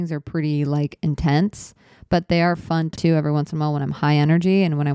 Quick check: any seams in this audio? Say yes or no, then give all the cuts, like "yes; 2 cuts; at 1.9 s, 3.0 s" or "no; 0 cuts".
yes; 1 cut; at 3.0 s